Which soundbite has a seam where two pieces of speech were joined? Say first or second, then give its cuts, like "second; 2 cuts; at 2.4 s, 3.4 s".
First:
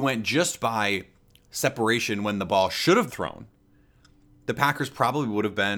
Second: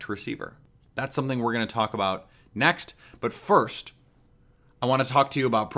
first; 1 cut; at 3.1 s